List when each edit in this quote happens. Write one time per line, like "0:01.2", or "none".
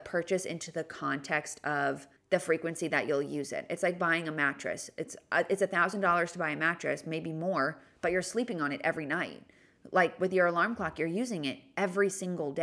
0:02.2